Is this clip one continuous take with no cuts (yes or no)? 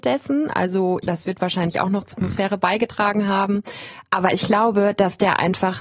no